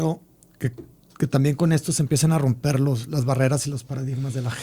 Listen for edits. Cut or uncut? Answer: uncut